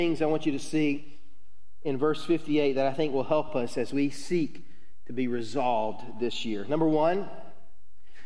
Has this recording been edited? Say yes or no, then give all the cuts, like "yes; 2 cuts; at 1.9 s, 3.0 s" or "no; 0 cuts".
no; 0 cuts